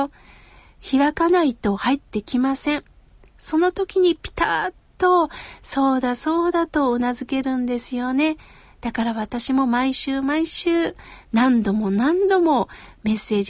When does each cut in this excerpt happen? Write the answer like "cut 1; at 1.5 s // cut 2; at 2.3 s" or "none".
none

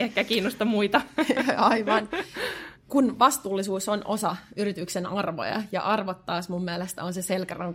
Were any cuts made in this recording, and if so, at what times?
none

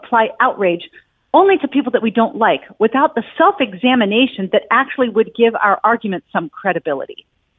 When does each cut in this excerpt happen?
none

